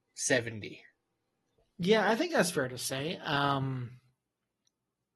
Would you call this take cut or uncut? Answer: uncut